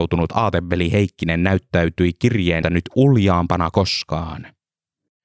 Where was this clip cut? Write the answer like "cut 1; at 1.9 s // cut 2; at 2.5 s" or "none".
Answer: cut 1; at 2.6 s // cut 2; at 3.7 s